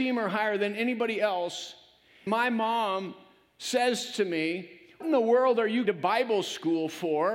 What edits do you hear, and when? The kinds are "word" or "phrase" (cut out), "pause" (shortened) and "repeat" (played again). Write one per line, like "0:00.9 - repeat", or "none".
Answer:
0:02.3 - word
0:05.0 - word
0:05.9 - word